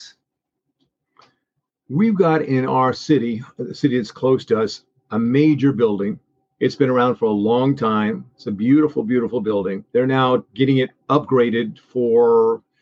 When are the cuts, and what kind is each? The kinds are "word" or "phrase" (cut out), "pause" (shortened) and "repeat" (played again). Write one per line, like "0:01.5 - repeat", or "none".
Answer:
0:06.4 - pause
0:09.9 - pause
0:10.5 - pause
0:11.0 - pause